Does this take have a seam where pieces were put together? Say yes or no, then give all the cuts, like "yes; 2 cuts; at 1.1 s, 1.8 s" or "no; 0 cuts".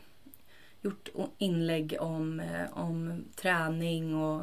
no; 0 cuts